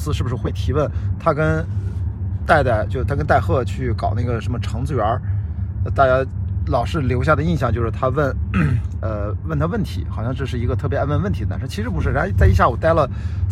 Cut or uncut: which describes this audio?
uncut